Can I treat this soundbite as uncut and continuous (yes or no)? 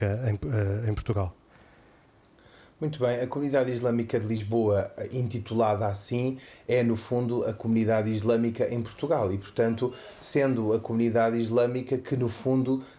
yes